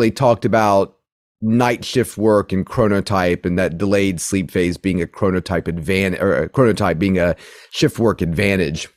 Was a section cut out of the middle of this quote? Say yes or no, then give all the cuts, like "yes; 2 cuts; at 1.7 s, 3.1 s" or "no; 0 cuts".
no; 0 cuts